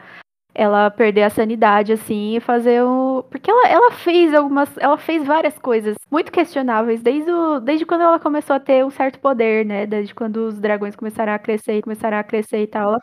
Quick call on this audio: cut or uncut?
cut